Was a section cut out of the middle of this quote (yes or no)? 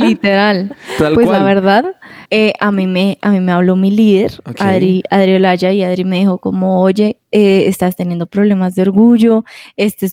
yes